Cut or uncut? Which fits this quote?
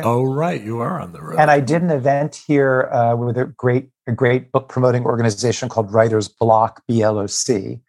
uncut